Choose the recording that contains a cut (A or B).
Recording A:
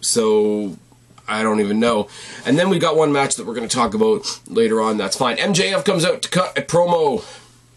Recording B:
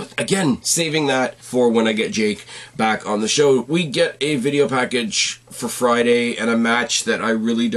B